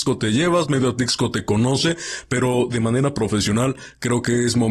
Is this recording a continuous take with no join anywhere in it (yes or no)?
yes